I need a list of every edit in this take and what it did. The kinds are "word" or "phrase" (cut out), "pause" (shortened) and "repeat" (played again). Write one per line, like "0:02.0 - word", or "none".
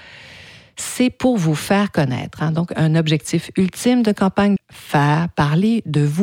0:04.6 - phrase